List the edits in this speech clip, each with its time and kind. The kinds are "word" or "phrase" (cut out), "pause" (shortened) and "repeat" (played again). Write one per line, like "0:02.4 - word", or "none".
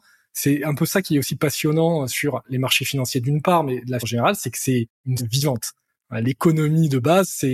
0:04.0 - word
0:05.2 - word